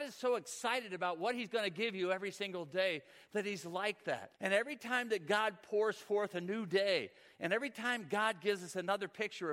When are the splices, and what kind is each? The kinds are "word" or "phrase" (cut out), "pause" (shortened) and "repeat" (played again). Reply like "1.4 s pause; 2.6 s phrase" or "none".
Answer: 4.4 s pause